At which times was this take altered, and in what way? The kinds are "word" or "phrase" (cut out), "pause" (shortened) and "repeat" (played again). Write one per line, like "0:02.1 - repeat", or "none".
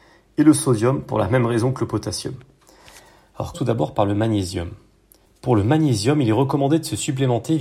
0:03.5 - word
0:05.2 - pause